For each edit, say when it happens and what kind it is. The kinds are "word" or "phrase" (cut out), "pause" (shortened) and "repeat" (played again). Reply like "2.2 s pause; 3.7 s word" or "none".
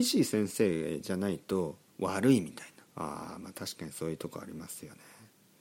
2.9 s pause

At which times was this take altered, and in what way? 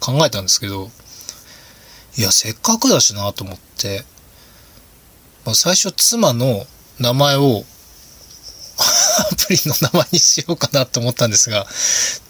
2.6 s pause

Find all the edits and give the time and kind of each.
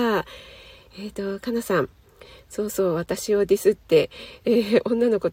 none

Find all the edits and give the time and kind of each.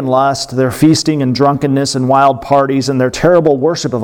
none

